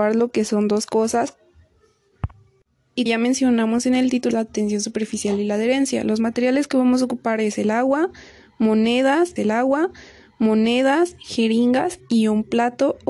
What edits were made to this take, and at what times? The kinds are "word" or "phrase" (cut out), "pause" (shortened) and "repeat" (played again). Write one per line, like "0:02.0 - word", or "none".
0:03.1 - word
0:04.3 - word
0:09.4 - repeat

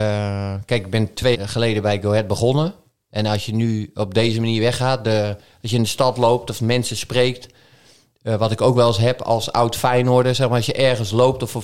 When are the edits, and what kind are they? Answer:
0:01.3 - word

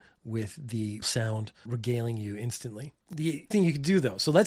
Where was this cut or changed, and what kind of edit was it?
0:01.0 - word
0:01.7 - word
0:03.5 - word

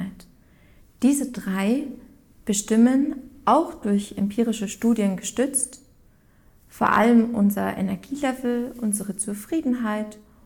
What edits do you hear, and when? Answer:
none

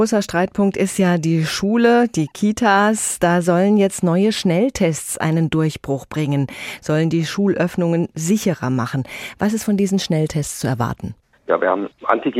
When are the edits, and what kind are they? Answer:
0:11.3 - pause

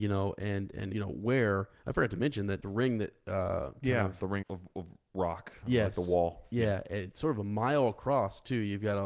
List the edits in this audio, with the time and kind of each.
0:00.9 - phrase
0:02.6 - phrase
0:04.4 - word

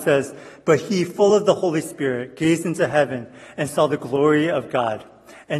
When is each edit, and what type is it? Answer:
none

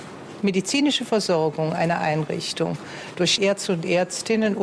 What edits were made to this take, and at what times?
0:03.4 - word

